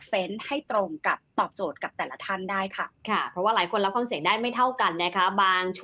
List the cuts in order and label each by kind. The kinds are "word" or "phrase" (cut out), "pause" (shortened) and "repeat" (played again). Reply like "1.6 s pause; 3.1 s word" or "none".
3.0 s pause